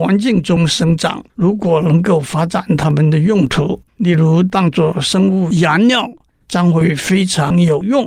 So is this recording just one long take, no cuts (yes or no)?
no